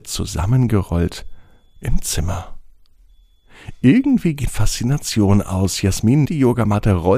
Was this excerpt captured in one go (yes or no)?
no